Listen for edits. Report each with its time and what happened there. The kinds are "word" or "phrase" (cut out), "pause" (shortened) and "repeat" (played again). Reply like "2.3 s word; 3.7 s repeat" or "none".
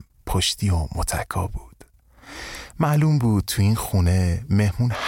none